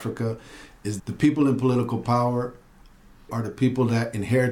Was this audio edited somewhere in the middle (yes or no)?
yes